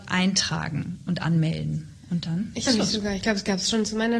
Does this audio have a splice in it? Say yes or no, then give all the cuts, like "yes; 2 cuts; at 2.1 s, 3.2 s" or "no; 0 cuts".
yes; 1 cut; at 2.7 s